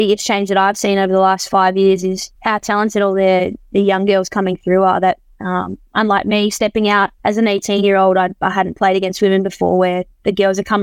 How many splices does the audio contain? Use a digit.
2